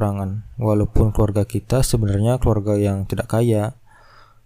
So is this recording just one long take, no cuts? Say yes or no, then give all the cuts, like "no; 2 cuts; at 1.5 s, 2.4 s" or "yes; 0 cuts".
yes; 0 cuts